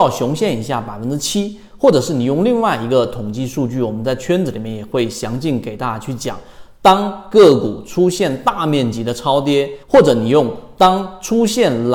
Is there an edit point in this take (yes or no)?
yes